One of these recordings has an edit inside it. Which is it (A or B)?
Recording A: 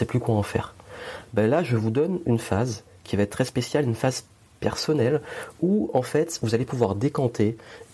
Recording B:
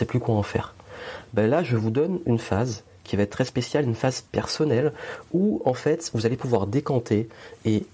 B